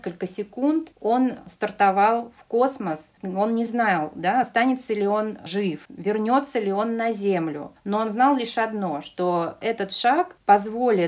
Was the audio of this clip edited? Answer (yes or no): no